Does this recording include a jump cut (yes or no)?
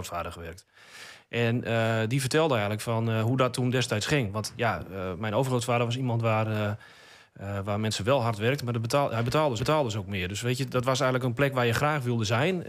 yes